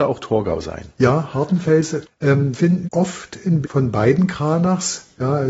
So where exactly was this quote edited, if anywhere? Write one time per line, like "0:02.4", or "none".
0:02.0
0:02.5
0:02.8
0:03.6